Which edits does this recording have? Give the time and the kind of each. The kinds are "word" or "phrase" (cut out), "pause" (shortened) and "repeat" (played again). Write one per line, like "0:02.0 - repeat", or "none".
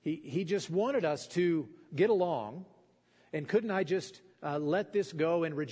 none

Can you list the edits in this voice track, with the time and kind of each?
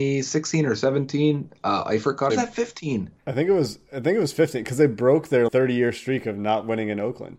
0:02.3 - phrase
0:03.2 - pause
0:05.5 - word

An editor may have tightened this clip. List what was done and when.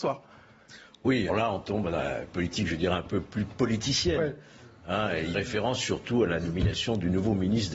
0:01.3 - word
0:05.3 - word

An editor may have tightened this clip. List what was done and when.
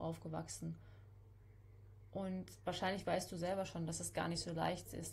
none

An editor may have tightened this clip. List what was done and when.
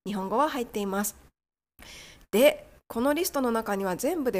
none

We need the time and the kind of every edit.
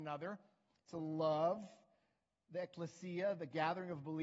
none

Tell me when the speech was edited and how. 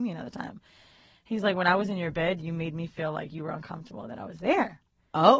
none

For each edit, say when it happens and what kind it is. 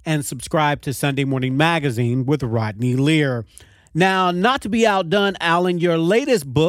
none

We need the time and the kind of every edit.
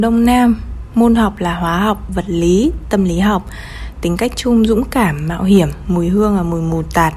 none

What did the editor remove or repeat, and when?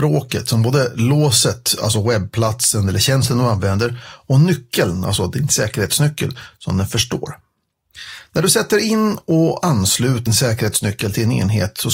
0:10.3 - word

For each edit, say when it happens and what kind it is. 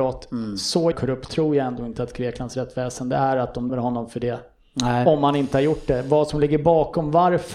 0:00.9 - word
0:03.7 - word

